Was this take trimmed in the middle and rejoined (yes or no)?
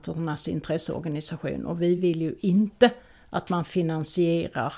no